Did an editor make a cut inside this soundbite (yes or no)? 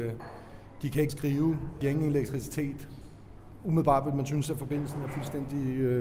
yes